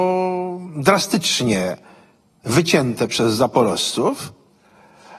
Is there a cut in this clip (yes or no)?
no